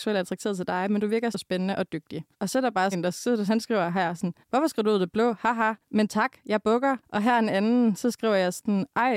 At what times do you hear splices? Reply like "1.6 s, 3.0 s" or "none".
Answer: 1.3 s, 2.3 s, 2.9 s, 3.5 s, 4.4 s, 5.8 s, 7.0 s